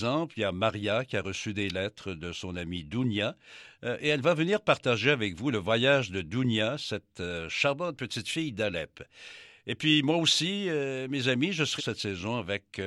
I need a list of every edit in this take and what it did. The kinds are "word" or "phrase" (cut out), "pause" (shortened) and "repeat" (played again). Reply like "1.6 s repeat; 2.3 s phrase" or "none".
11.8 s phrase